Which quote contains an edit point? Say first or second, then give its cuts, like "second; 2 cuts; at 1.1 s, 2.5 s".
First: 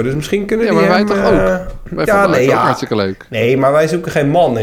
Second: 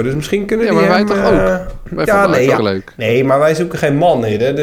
second; 1 cut; at 2.6 s